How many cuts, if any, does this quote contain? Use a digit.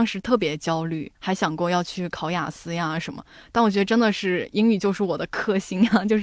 1